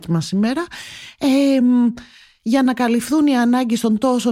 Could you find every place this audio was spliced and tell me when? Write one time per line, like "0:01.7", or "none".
none

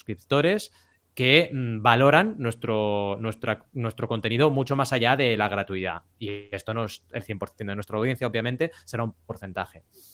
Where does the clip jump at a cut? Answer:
none

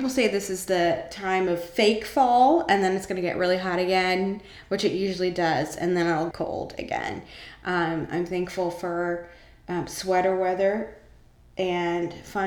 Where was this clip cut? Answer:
0:06.3

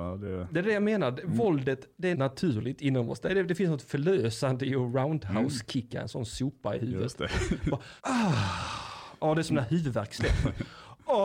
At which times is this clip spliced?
0:02.1
0:08.0

